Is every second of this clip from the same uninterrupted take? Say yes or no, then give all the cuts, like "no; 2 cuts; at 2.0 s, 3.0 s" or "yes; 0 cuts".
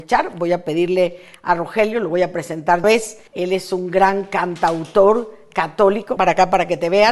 no; 3 cuts; at 2.8 s, 3.3 s, 6.2 s